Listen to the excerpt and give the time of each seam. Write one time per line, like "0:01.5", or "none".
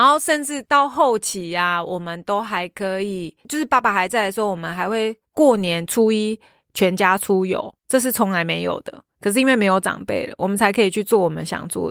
0:07.8